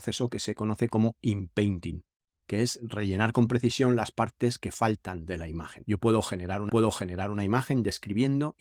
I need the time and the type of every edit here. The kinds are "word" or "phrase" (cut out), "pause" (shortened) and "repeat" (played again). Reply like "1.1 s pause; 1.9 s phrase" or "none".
6.7 s repeat